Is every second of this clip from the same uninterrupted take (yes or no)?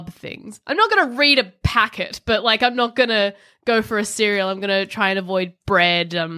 yes